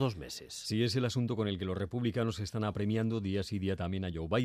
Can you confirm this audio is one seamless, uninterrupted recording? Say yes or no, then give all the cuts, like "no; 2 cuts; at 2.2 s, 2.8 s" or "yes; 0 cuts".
yes; 0 cuts